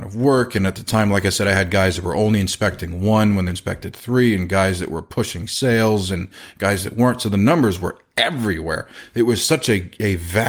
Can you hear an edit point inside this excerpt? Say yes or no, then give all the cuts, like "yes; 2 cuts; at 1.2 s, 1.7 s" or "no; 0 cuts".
yes; 1 cut; at 3.5 s